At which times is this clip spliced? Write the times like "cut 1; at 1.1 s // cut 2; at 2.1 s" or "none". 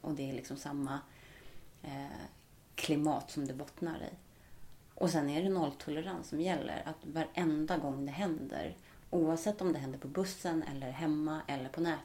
none